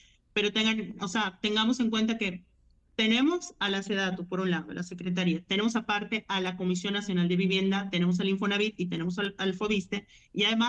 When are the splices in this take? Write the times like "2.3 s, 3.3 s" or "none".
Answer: none